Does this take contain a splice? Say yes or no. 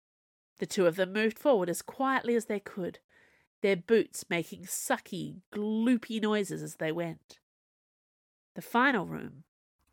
no